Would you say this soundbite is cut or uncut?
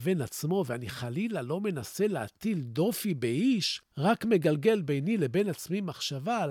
uncut